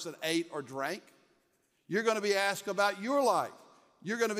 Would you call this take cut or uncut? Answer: uncut